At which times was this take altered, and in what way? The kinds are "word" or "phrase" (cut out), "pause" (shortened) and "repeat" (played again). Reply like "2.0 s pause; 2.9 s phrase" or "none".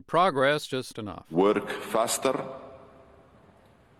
0.9 s phrase